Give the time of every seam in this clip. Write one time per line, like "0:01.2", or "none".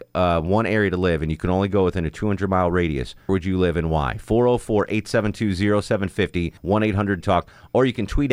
0:03.3
0:06.6
0:07.2